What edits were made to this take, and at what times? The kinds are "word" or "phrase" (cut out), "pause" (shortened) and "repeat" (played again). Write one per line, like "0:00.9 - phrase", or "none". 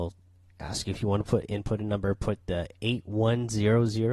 none